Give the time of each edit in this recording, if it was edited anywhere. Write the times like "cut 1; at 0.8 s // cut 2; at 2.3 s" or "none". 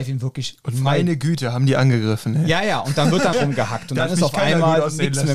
cut 1; at 3.3 s